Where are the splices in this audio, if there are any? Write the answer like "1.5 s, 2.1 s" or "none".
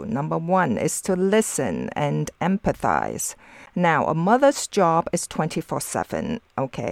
none